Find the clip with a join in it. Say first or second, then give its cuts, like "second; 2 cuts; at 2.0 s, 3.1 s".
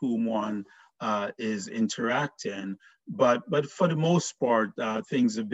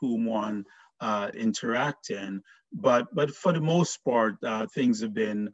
second; 1 cut; at 1.3 s